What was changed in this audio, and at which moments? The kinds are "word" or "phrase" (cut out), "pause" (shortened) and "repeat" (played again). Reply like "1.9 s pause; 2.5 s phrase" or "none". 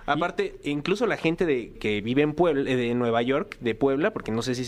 1.7 s word

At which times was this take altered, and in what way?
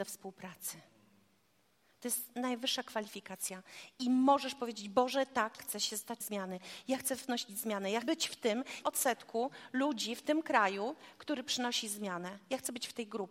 5.6 s word; 6.2 s word; 8.0 s word; 8.8 s word

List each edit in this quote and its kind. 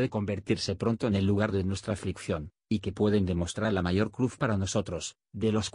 none

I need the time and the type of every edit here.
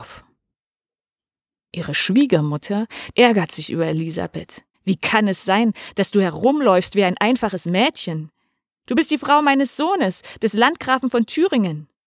4.7 s pause

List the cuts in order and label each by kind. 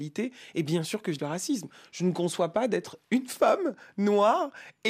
1.2 s word

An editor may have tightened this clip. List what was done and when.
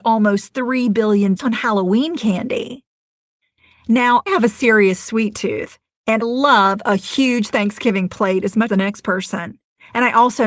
1.4 s word; 4.3 s word; 6.2 s word; 8.7 s word

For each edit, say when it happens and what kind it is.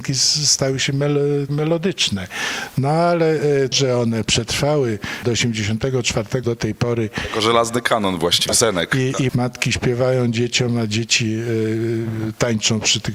1.5 s word; 3.7 s word; 5.2 s word; 6.4 s word; 8.5 s word; 9.3 s word

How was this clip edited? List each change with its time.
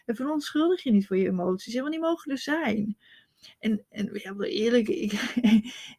none

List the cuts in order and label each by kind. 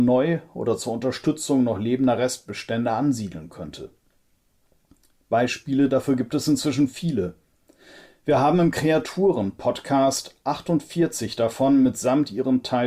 none

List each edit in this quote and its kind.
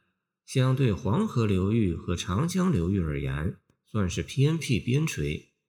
none

